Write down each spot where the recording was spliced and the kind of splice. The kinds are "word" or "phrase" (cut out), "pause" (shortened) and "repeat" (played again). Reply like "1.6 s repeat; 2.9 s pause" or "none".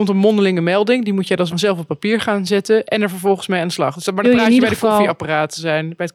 1.5 s word; 4.2 s phrase